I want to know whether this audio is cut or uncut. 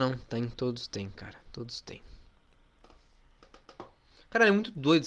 uncut